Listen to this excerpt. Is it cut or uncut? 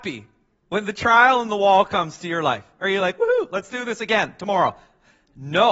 uncut